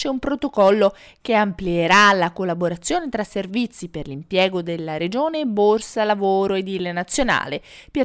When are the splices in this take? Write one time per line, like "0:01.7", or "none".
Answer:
none